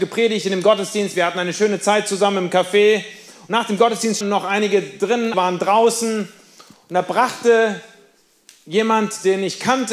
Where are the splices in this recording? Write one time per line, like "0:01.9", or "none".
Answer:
0:04.2
0:05.3